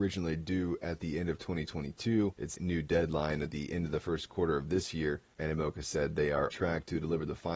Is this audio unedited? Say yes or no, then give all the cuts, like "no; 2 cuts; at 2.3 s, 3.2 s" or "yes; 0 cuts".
no; 2 cuts; at 2.5 s, 6.5 s